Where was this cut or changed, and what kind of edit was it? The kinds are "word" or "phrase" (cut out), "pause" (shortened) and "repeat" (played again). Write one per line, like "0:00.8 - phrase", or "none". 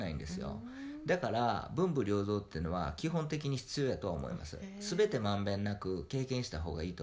none